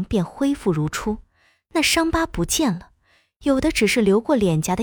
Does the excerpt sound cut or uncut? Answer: uncut